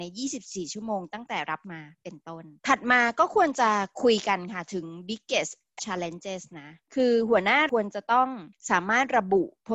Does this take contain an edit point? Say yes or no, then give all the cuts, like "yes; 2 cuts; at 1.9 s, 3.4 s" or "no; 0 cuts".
yes; 3 cuts; at 1.6 s, 2.6 s, 5.8 s